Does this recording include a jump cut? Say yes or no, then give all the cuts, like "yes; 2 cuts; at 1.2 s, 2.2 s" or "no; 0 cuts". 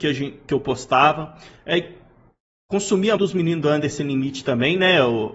yes; 1 cut; at 3.2 s